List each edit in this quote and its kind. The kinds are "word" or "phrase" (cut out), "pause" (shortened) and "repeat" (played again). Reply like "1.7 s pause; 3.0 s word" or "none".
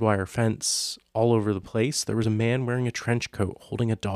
none